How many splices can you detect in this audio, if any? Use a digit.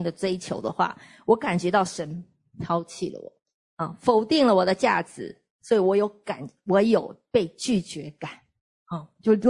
1